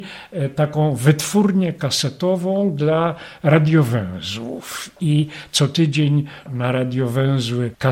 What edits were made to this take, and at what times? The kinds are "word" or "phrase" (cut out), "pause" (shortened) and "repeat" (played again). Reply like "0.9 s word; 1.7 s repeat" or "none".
6.5 s word